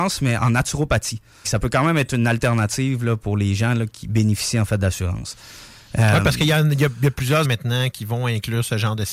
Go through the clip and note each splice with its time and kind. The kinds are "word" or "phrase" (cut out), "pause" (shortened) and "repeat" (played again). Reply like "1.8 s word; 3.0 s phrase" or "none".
1.4 s word; 3.9 s word; 7.4 s word